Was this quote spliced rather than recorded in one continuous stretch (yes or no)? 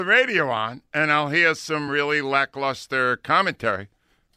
no